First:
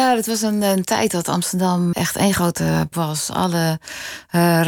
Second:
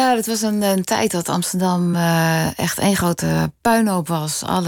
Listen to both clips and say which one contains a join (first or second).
first